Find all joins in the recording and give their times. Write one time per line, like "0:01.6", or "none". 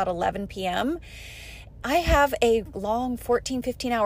0:01.8
0:02.7